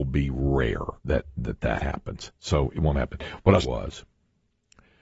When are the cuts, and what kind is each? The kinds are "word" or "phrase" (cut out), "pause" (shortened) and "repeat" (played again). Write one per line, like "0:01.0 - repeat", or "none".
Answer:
0:01.0 - pause
0:03.6 - phrase